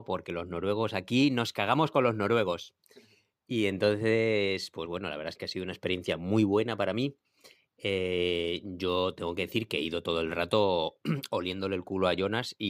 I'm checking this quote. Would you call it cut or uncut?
uncut